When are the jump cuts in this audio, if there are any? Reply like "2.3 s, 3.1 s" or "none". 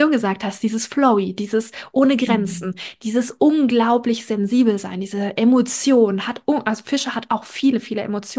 none